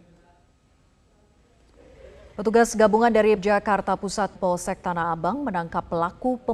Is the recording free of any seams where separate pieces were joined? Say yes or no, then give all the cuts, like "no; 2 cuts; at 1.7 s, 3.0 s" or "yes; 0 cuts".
no; 3 cuts; at 2.3 s, 3.4 s, 4.3 s